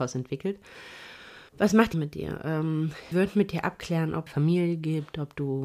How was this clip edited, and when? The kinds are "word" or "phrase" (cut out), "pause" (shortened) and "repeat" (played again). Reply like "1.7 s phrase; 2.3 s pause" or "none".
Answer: 1.5 s pause; 1.9 s phrase; 3.1 s word; 4.3 s phrase